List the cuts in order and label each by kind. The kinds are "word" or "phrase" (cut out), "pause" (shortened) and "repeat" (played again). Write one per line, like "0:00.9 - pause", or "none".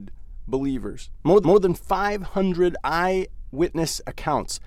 0:01.4 - repeat

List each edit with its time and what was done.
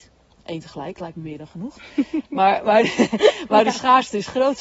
none

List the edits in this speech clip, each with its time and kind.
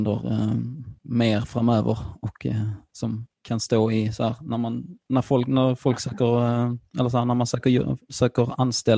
0:01.0 - pause
0:03.3 - pause

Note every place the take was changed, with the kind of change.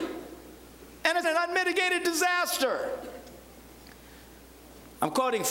0:01.2 - word

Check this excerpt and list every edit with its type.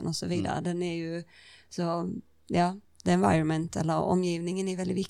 none

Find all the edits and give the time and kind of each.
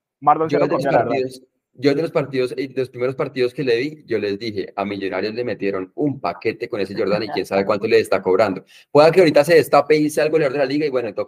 none

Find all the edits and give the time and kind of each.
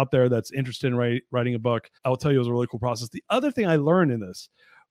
0:02.0 - pause

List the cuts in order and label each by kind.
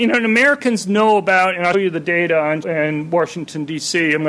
0:01.7 - word
0:02.6 - word

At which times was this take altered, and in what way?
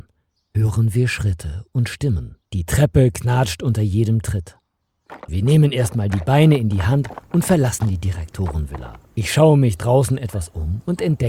0:02.4 - pause
0:09.0 - pause

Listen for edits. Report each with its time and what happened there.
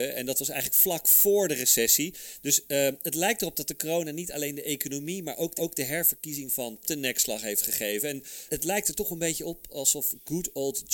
0:05.6 - repeat
0:06.8 - word
0:08.5 - word

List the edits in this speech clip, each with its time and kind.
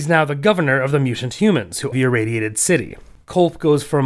0:01.9 - word

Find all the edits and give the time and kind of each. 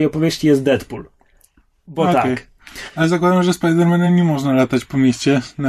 none

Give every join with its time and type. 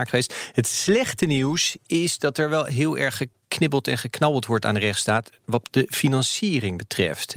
none

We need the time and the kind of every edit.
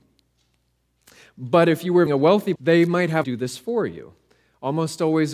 0:02.1 - word
0:02.6 - word
0:03.2 - phrase

